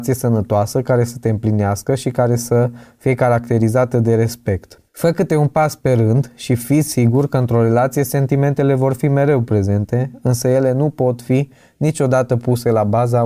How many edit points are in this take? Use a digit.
1